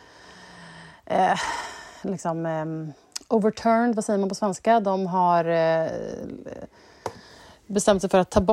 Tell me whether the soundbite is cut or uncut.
uncut